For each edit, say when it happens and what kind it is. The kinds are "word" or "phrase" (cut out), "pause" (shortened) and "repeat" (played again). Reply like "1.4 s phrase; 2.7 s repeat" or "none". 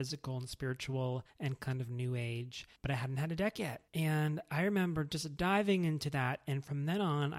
1.3 s pause; 2.8 s pause; 3.9 s pause